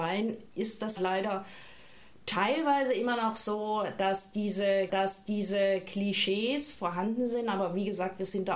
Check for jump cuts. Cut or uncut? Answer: cut